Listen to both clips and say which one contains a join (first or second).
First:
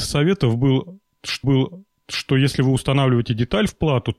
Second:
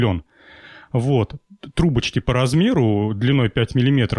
first